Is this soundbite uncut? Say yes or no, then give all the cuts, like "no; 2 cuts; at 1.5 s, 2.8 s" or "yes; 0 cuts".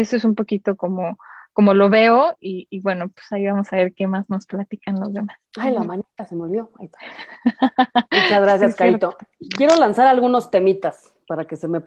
no; 1 cut; at 5.5 s